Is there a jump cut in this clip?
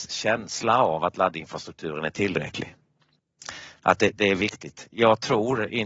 no; 0 cuts

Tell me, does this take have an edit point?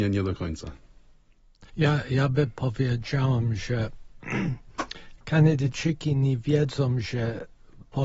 yes; 1 cut; at 1.7 s

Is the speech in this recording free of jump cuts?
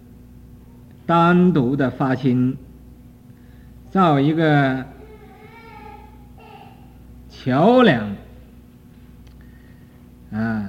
yes; 0 cuts

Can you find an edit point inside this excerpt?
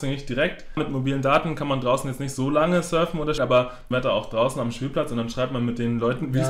yes; 2 cuts; at 3.4 s, 3.9 s

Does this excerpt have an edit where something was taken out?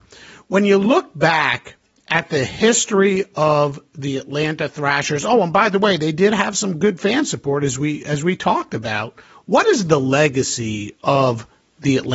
no; 0 cuts

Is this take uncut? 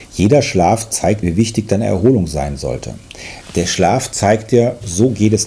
no; 1 cut; at 1.2 s

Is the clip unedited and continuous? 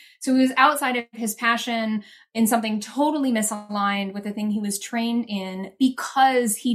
yes; 0 cuts

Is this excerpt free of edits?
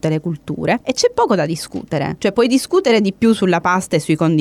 yes; 0 cuts

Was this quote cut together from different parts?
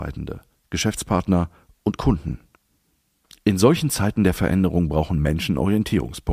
no; 0 cuts

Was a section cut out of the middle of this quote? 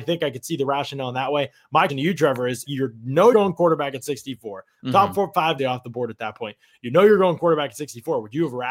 yes; 4 cuts; at 1.9 s, 2.6 s, 3.3 s, 5.6 s

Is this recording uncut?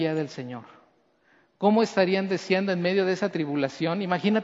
yes; 0 cuts

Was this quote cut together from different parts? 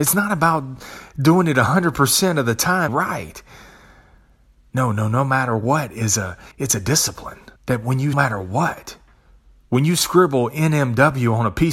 yes; 4 cuts; at 2.9 s, 6.5 s, 7.6 s, 8.1 s

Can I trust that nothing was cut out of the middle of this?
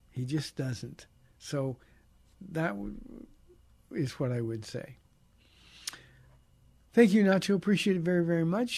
yes; 0 cuts

